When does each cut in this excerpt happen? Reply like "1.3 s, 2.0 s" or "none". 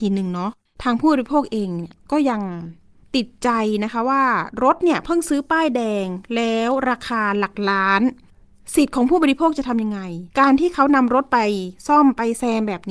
10.3 s